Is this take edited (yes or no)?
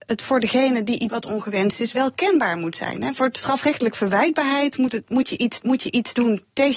yes